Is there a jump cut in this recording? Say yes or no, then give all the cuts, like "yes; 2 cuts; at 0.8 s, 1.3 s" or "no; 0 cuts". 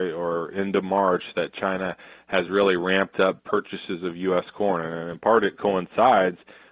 no; 0 cuts